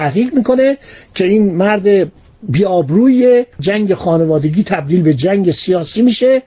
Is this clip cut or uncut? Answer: cut